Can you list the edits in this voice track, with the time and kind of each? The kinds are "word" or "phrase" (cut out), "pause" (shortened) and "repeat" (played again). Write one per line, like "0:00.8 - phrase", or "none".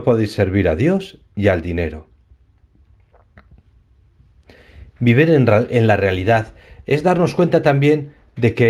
none